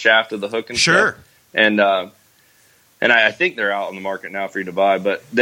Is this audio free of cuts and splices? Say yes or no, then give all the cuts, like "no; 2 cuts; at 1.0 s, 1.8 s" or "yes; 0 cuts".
yes; 0 cuts